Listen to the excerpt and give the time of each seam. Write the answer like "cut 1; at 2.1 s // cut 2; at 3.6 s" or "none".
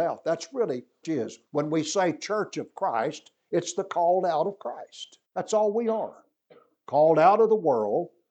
cut 1; at 1.0 s // cut 2; at 1.5 s // cut 3; at 5.2 s